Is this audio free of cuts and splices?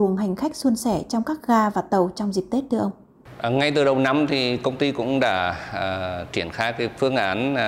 yes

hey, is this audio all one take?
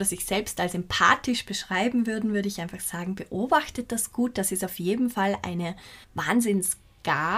no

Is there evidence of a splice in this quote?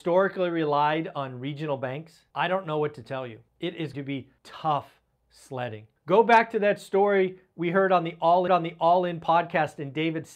yes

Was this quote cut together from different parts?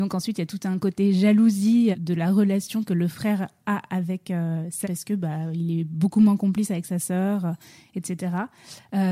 yes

